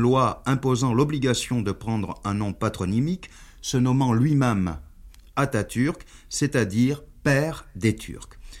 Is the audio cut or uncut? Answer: uncut